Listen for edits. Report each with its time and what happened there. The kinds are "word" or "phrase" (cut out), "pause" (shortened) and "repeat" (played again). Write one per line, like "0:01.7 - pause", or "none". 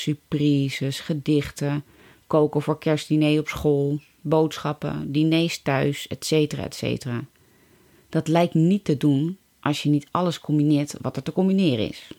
none